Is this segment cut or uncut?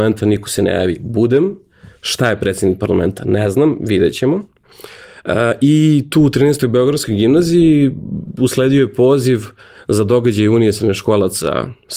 uncut